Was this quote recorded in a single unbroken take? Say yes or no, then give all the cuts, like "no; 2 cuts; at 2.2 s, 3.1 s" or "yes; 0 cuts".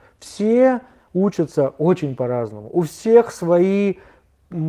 yes; 0 cuts